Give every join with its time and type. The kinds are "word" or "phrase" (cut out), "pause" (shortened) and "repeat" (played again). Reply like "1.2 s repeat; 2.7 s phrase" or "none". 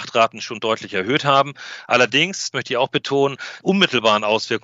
2.5 s word; 3.6 s word